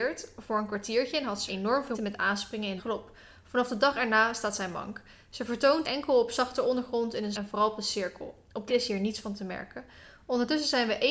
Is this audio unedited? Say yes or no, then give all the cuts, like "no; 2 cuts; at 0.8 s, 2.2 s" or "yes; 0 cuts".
no; 6 cuts; at 1.5 s, 1.9 s, 2.8 s, 5.8 s, 7.3 s, 8.7 s